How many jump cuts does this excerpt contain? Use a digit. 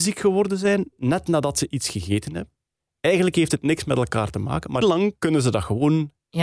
1